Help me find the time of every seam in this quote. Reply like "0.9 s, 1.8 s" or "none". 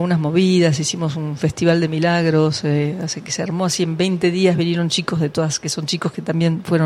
none